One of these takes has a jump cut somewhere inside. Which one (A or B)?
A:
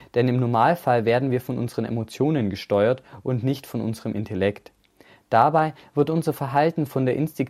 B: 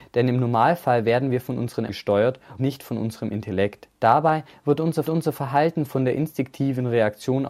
B